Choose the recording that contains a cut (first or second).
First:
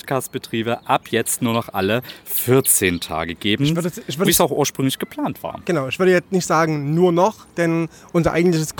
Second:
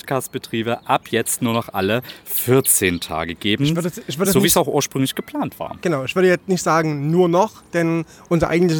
first